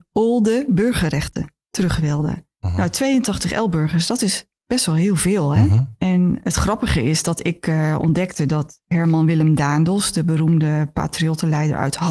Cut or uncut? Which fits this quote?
uncut